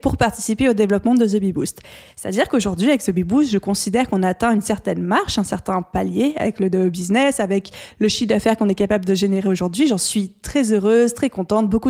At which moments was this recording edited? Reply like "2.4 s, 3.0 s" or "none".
none